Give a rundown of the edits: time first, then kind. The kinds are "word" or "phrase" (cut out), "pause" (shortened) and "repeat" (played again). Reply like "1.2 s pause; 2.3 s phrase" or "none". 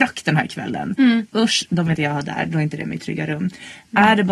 1.9 s word